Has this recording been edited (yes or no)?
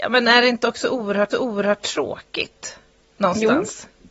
yes